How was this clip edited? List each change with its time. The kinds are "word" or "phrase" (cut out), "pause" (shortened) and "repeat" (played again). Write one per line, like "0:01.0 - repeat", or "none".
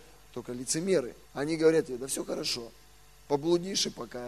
0:01.2 - pause

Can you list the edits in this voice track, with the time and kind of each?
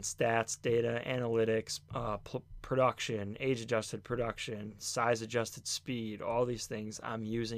0:01.9 - pause

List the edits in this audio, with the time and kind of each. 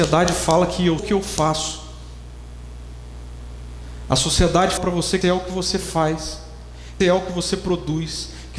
0:01.0 - word
0:04.8 - word
0:05.2 - word
0:07.0 - word

